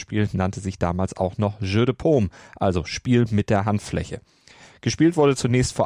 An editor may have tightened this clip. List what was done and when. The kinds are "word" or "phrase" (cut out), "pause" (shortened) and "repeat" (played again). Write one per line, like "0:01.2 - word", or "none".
none